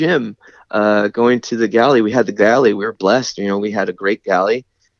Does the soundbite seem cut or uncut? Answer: uncut